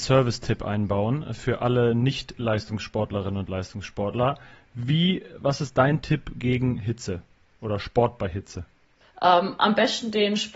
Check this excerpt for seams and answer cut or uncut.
uncut